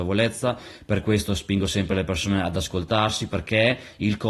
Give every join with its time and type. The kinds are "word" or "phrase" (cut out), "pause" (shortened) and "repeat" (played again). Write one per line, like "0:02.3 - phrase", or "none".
none